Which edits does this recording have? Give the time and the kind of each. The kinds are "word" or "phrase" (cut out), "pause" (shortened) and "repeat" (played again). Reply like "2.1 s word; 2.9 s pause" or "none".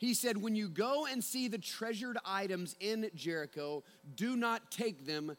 none

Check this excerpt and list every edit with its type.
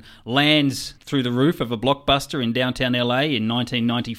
1.0 s pause

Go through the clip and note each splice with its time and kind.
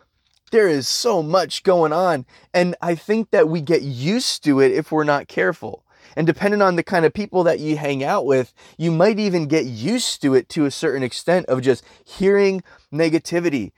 none

